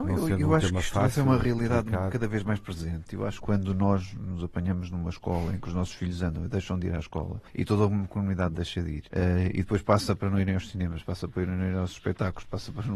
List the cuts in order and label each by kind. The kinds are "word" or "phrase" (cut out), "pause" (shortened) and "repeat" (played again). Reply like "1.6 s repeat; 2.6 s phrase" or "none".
3.4 s word; 7.5 s pause; 9.1 s pause